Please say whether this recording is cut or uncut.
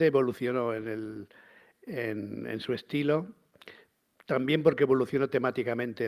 uncut